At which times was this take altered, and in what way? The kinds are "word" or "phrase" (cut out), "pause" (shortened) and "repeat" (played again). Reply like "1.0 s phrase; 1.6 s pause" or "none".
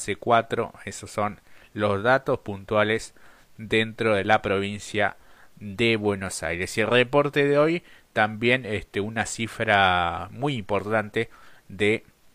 none